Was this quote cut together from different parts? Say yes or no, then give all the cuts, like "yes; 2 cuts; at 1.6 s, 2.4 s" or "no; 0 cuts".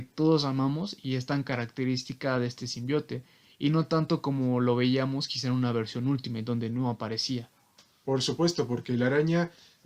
no; 0 cuts